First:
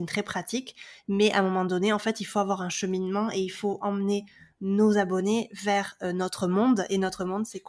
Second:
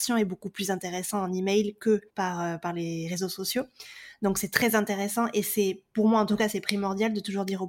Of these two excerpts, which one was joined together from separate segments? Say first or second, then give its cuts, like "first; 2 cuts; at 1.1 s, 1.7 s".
second; 1 cut; at 2.1 s